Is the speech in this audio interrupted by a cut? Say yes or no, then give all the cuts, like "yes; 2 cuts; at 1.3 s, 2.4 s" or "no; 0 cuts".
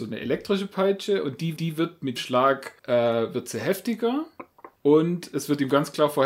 yes; 4 cuts; at 1.6 s, 2.2 s, 2.8 s, 4.8 s